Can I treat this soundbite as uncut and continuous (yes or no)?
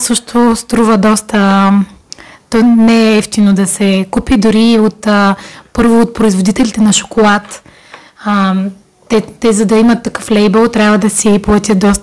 yes